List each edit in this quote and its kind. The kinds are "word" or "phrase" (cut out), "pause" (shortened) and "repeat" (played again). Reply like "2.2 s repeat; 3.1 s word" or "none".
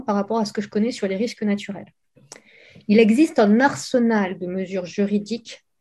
none